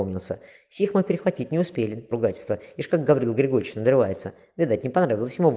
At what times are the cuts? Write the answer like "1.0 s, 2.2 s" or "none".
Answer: 2.1 s